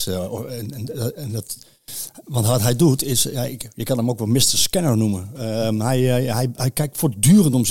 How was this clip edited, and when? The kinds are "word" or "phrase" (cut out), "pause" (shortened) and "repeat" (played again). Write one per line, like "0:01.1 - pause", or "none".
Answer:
0:06.5 - word